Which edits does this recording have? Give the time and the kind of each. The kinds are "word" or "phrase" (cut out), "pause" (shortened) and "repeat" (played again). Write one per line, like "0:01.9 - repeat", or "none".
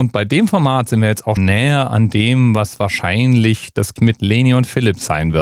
0:01.4 - word
0:04.0 - word